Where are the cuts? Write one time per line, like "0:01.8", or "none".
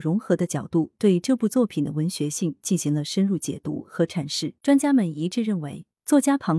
0:04.6

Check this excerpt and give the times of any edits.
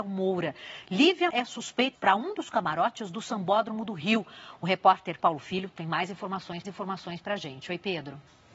0:01.3
0:01.9
0:05.2
0:06.6

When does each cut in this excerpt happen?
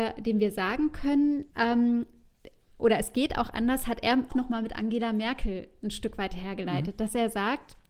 0:01.5
0:04.3

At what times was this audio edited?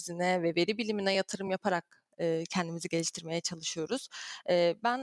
none

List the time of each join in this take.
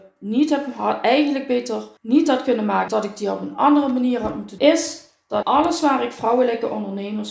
0:02.0
0:02.9
0:04.6
0:05.4

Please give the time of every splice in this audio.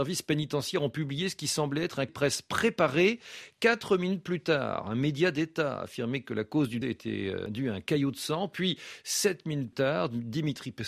0:02.1
0:06.8
0:09.7

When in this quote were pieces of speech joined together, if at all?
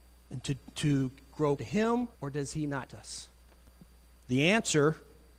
0:01.6
0:02.1
0:02.9

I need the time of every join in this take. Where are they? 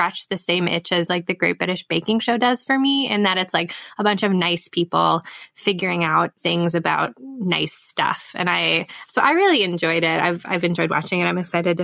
0:06.4

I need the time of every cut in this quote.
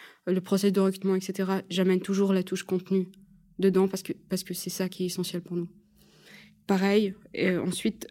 none

